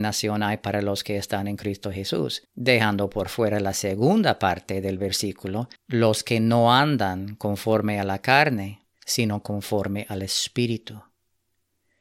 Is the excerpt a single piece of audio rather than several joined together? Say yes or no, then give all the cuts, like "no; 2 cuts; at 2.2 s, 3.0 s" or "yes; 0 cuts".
no; 3 cuts; at 2.5 s, 5.8 s, 8.9 s